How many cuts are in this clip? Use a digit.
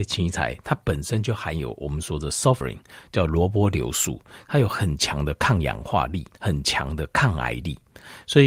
2